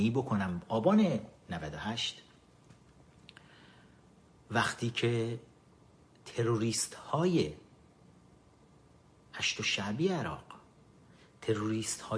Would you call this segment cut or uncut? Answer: uncut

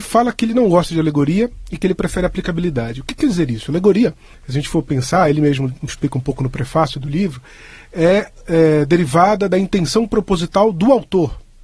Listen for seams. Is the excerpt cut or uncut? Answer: uncut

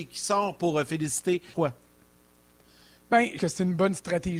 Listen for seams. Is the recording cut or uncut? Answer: cut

